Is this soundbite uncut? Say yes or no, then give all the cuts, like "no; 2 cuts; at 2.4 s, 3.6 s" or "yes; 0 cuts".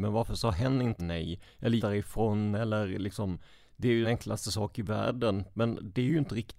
no; 3 cuts; at 1.0 s, 1.8 s, 4.0 s